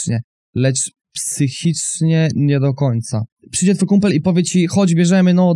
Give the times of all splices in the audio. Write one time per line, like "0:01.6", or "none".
0:03.3